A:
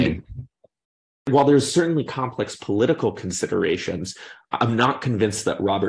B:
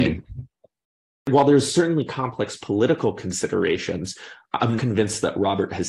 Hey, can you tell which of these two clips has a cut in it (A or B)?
B